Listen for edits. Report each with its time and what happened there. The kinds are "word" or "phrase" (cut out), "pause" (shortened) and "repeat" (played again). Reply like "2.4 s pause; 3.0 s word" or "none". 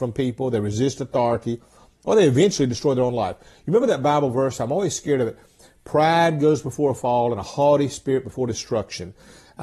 none